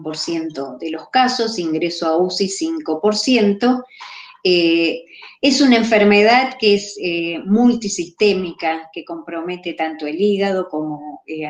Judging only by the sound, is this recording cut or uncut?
uncut